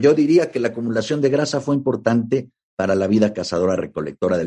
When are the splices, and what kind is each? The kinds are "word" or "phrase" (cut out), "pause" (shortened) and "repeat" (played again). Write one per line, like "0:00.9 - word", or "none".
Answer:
none